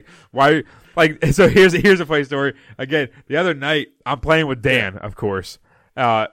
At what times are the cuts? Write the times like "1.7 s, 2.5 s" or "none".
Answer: none